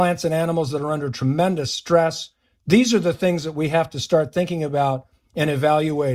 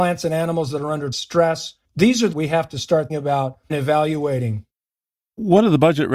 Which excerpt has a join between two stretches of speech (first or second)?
second